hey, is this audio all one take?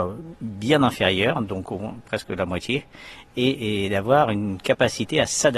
yes; 0 cuts

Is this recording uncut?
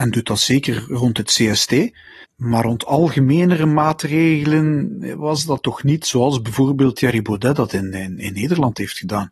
no; 1 cut; at 2.3 s

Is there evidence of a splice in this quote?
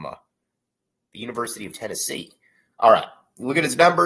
no; 0 cuts

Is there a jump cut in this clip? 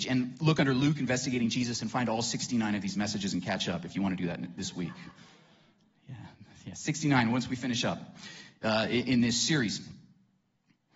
no; 0 cuts

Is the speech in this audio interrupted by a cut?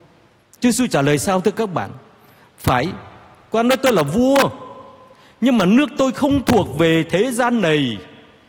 no; 0 cuts

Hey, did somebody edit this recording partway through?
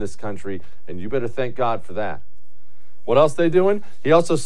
no; 0 cuts

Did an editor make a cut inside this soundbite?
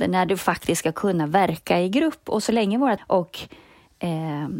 yes; 1 cut; at 3.0 s

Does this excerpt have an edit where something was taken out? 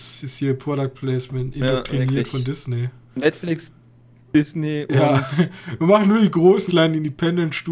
yes; 2 cuts; at 3.0 s, 6.7 s

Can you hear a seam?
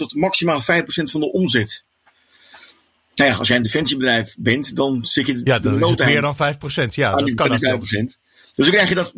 no; 0 cuts

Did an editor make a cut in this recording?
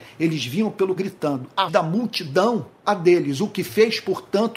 yes; 3 cuts; at 1.0 s, 1.7 s, 2.8 s

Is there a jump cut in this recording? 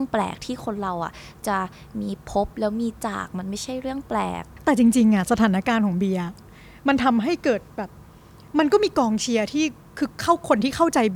no; 0 cuts

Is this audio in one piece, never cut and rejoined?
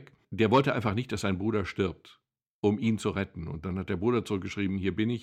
yes; 0 cuts

